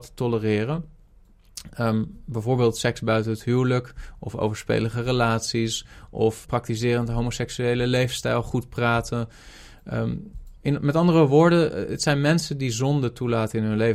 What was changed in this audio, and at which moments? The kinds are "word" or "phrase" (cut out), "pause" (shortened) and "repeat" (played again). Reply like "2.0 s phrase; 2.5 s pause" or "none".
6.4 s word